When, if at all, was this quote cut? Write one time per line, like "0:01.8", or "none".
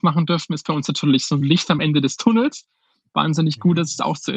none